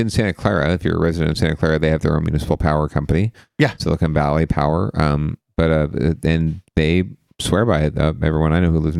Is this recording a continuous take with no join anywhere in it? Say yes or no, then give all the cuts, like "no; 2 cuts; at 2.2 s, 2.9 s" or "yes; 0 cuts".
yes; 0 cuts